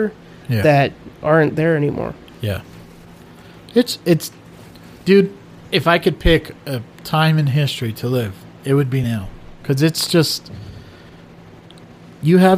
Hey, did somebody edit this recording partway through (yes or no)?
no